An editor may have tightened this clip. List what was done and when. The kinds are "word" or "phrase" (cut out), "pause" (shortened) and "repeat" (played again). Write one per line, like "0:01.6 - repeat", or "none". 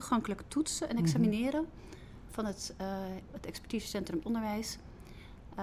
0:03.3 - word
0:04.2 - word